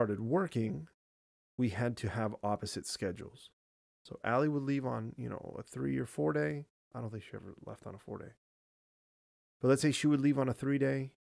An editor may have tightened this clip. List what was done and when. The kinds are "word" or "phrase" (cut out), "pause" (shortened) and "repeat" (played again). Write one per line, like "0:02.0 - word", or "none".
none